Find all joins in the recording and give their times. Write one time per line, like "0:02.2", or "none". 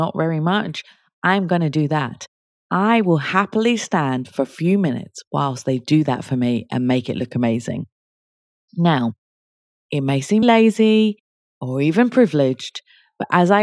0:10.4